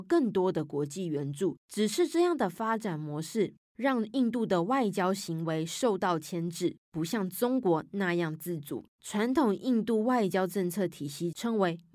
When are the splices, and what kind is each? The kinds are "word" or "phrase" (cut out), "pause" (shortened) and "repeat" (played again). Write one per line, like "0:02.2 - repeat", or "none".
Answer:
0:01.6 - pause
0:08.9 - pause